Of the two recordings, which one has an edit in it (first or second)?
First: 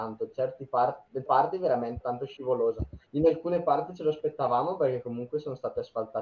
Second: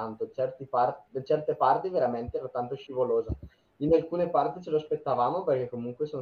first